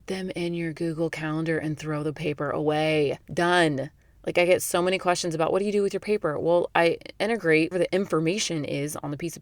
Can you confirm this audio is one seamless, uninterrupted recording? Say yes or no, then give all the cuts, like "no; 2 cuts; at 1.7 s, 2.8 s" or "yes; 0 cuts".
no; 2 cuts; at 3.2 s, 7.7 s